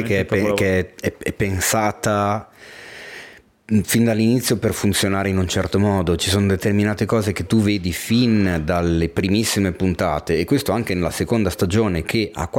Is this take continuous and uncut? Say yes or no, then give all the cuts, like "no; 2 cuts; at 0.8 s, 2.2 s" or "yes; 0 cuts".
no; 1 cut; at 6.2 s